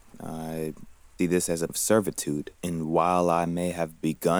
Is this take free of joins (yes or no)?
no